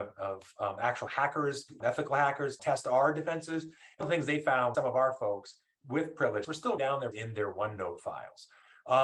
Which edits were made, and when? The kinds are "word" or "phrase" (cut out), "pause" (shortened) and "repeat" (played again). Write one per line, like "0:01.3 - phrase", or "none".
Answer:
0:01.8 - word
0:02.6 - word
0:04.0 - word
0:04.7 - word
0:05.8 - word
0:06.4 - word
0:06.8 - word
0:07.1 - word

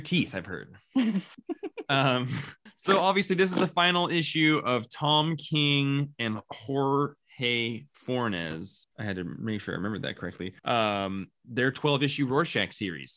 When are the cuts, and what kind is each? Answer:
0:07.9 - pause
0:10.6 - pause

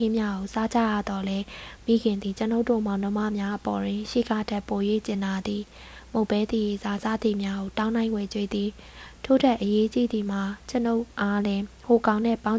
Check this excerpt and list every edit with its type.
0:11.1 - pause

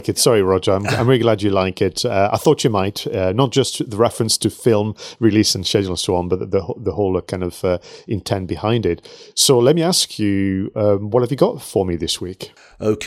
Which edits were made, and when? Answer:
none

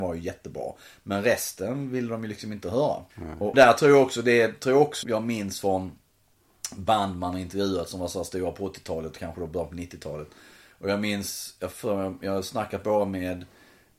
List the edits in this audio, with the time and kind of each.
0:03.1 - pause
0:03.5 - word
0:05.0 - word

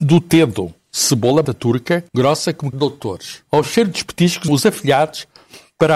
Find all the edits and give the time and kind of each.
0:01.4 - word
0:02.1 - pause
0:02.7 - word
0:03.5 - pause
0:04.5 - word

